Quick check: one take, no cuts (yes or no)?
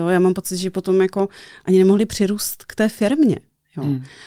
yes